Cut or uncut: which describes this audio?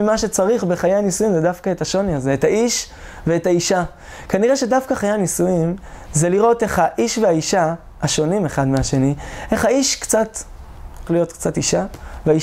cut